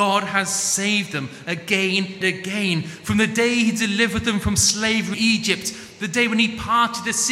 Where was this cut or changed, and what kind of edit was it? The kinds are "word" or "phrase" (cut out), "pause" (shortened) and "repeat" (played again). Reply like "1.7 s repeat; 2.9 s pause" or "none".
2.2 s word; 5.1 s word